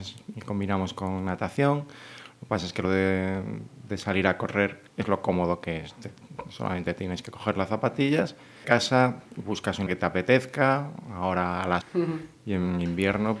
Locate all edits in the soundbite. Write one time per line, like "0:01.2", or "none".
0:02.8
0:04.9
0:08.6
0:09.2
0:09.9
0:11.8